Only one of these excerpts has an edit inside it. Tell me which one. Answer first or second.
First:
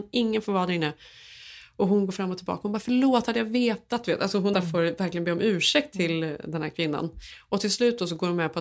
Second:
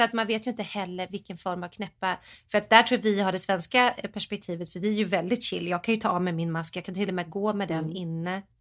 first